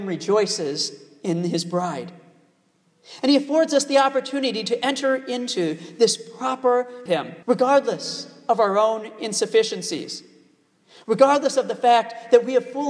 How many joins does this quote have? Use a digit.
2